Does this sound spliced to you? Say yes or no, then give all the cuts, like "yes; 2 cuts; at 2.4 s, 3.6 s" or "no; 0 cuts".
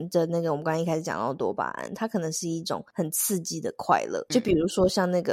yes; 1 cut; at 4.3 s